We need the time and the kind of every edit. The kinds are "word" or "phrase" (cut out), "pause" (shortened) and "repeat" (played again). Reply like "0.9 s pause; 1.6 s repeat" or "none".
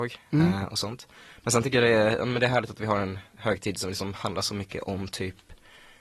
none